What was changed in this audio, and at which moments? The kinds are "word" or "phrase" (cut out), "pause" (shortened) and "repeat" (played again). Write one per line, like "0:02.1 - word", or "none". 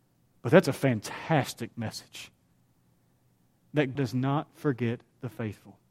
0:04.0 - word